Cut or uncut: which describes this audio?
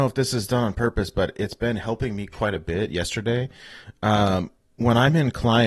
uncut